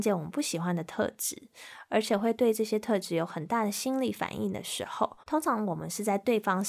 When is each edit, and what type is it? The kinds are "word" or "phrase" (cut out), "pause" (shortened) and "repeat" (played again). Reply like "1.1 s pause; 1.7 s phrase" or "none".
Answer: 5.2 s pause